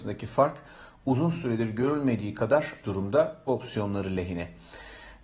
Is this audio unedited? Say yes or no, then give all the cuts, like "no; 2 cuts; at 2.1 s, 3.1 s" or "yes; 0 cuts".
no; 2 cuts; at 2.8 s, 3.5 s